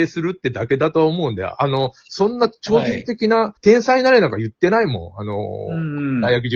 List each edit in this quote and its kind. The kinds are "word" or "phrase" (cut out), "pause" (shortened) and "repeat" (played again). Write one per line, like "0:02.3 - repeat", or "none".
0:03.6 - pause